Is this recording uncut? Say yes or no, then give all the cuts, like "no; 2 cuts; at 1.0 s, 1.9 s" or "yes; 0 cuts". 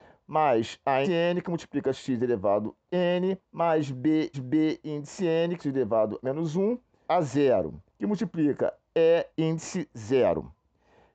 no; 9 cuts; at 1.0 s, 2.9 s, 3.4 s, 4.3 s, 5.6 s, 6.2 s, 7.1 s, 7.9 s, 9.3 s